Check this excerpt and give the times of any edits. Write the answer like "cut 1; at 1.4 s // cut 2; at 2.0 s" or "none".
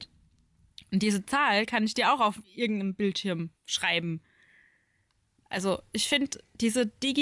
cut 1; at 2.4 s // cut 2; at 3.6 s